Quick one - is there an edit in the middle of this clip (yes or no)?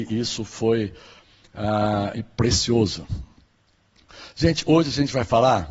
no